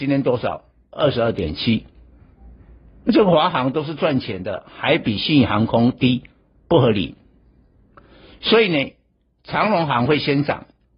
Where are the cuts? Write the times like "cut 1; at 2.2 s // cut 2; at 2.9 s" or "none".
none